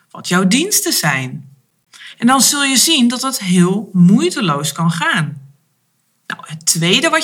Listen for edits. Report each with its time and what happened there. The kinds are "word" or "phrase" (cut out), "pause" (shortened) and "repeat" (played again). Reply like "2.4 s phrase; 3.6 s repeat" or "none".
none

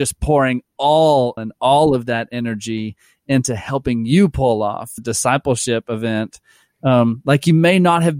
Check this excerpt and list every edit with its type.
1.4 s phrase; 5.0 s word

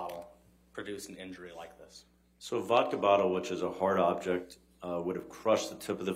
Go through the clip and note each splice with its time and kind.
none

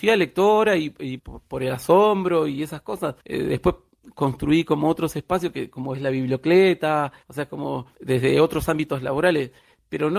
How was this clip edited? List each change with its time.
1.2 s word

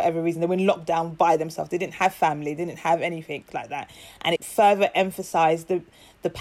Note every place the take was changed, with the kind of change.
4.4 s phrase

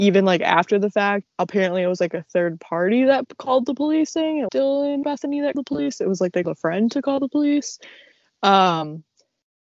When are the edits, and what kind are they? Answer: 1.3 s word; 4.1 s word; 4.5 s word; 5.0 s word; 5.5 s word; 6.4 s word

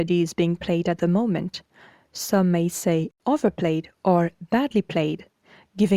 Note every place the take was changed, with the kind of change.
none

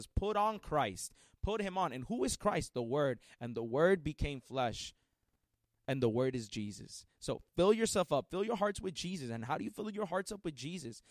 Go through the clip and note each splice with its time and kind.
none

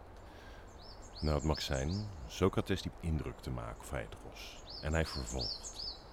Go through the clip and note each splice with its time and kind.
1.6 s word; 2.9 s word; 3.8 s word

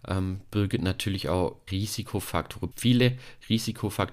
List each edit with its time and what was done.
1.7 s word; 2.7 s word

